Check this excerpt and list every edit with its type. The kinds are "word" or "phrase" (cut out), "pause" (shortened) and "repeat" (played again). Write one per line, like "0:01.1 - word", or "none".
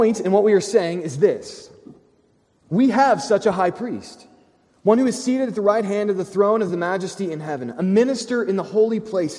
none

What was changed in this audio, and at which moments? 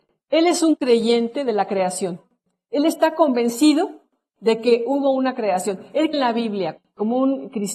0:06.1 - word

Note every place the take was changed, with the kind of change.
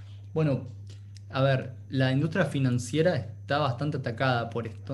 none

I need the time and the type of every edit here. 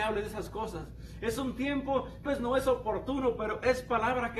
0:02.3 - word

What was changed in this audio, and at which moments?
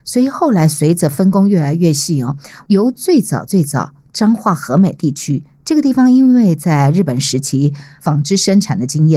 none

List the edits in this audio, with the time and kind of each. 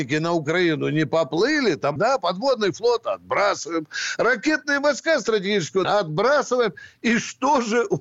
0:02.0 - word
0:05.8 - word

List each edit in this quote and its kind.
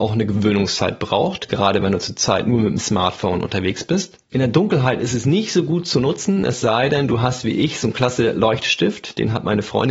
0:04.2 - pause

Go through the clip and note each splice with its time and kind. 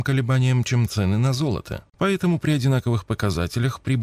0:01.9 - pause

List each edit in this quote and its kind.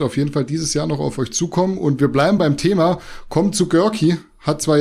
none

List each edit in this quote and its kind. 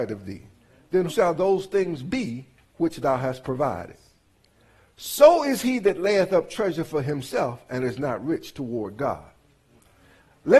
0:01.1 - word

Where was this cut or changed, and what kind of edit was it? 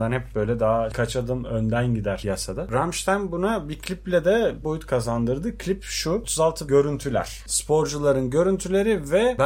0:04.6 - phrase
0:06.7 - phrase

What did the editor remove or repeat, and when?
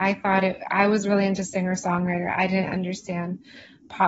none

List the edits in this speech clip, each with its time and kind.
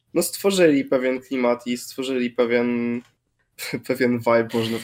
none

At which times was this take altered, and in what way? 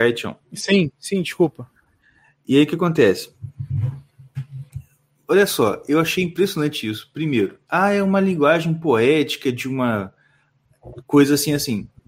none

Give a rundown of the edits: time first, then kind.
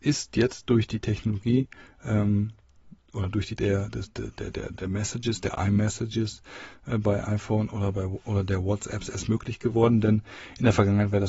0:03.6 - word

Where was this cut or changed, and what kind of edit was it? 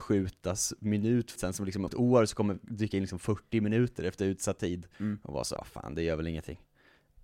0:01.4 - word
0:01.9 - word
0:02.6 - word
0:04.9 - pause
0:05.6 - word

